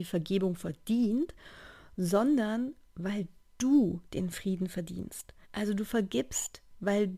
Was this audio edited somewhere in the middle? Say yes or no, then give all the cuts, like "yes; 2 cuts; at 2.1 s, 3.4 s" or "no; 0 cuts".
yes; 1 cut; at 5.4 s